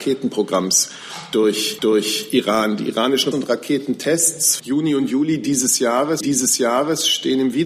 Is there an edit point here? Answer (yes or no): yes